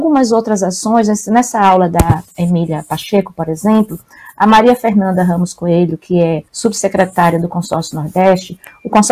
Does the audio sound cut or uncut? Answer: cut